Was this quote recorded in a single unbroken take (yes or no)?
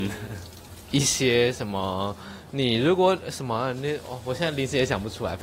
no